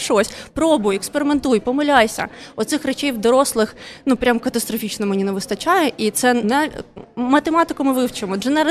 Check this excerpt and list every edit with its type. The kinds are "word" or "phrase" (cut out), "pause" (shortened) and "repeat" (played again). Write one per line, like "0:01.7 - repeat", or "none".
0:06.4 - word